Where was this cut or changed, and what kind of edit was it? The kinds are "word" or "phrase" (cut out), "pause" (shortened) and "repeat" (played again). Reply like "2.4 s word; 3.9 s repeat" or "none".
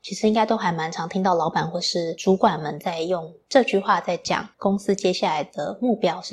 4.5 s pause